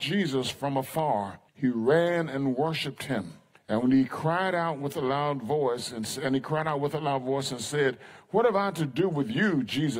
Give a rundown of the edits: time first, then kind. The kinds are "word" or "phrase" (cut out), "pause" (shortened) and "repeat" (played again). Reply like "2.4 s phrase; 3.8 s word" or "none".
1.5 s pause; 3.5 s pause